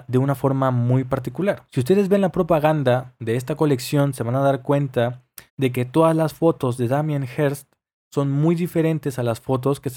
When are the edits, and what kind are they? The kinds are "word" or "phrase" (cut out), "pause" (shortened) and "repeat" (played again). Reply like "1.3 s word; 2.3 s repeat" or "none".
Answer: 5.5 s pause